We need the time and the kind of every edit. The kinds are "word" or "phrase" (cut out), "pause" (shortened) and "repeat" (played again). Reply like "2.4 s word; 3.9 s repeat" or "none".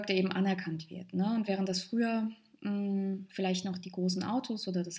none